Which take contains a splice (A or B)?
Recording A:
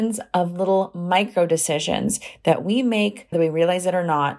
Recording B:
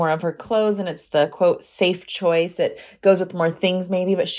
A